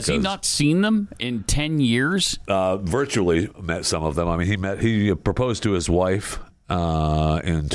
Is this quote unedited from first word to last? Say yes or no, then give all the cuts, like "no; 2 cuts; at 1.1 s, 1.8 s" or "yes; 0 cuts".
yes; 0 cuts